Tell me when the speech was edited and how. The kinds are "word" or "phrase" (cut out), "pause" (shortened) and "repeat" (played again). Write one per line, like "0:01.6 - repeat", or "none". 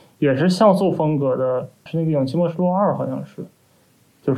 0:01.9 - phrase